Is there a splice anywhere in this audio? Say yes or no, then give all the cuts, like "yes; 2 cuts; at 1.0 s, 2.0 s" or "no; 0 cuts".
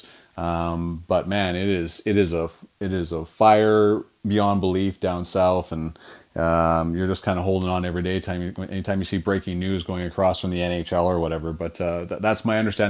no; 0 cuts